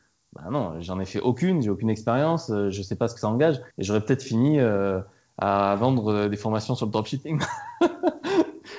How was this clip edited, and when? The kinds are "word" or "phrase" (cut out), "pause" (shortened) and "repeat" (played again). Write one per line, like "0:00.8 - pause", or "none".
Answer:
0:03.7 - pause